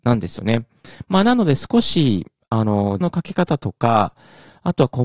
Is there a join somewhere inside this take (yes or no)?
yes